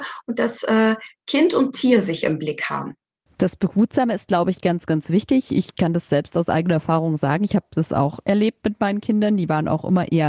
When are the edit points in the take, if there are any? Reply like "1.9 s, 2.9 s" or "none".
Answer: none